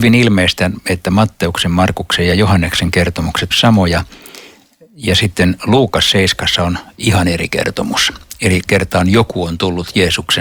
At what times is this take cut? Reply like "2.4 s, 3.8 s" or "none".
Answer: 3.5 s, 8.7 s